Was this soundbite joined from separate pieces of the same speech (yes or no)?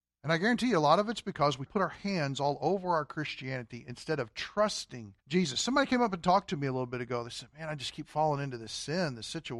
yes